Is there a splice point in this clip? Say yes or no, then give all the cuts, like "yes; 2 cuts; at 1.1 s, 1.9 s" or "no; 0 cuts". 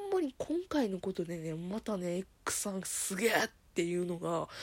no; 0 cuts